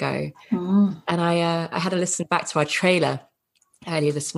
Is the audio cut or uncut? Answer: uncut